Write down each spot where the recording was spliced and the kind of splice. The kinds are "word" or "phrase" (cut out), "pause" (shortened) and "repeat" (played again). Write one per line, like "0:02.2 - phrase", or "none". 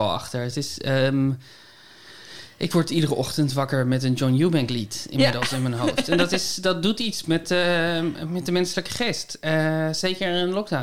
none